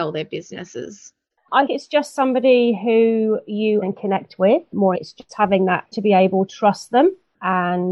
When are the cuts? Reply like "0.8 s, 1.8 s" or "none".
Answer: 1.7 s, 3.8 s, 4.9 s, 5.3 s, 5.9 s, 6.5 s